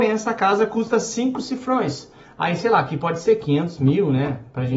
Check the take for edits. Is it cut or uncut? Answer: uncut